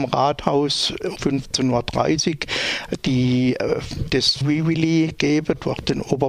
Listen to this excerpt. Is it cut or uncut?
cut